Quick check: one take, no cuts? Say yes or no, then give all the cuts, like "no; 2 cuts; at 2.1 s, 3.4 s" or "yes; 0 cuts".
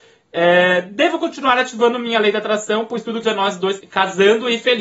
no; 2 cuts; at 3.2 s, 3.8 s